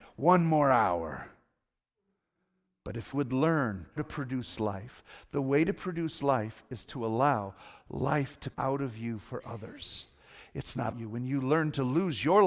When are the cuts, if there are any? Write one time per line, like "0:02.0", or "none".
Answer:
0:03.1
0:04.0
0:08.5
0:10.9